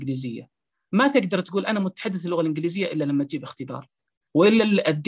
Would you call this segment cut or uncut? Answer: uncut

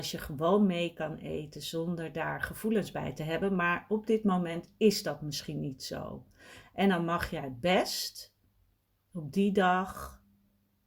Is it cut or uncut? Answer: uncut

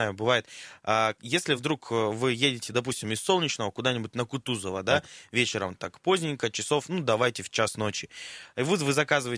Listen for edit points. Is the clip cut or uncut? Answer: uncut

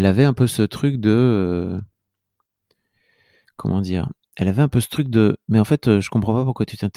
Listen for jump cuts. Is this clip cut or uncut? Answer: uncut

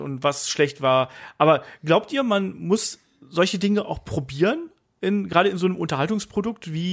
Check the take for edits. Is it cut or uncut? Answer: uncut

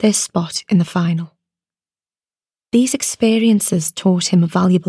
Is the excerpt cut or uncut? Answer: uncut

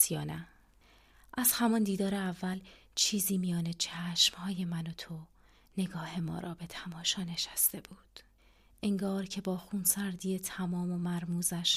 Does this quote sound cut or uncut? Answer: uncut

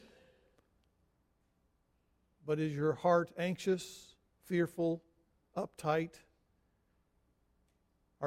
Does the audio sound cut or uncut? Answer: uncut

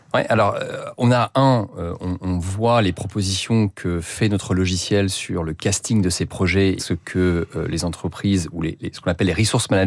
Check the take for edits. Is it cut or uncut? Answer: cut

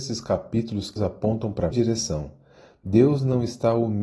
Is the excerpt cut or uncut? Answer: cut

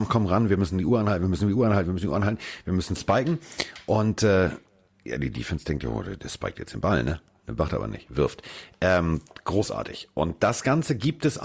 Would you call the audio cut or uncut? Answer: uncut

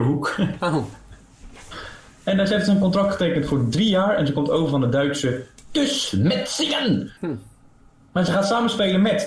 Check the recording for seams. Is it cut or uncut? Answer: cut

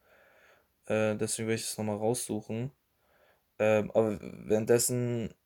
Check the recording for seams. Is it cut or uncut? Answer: uncut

